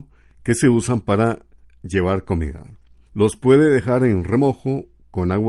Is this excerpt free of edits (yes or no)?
yes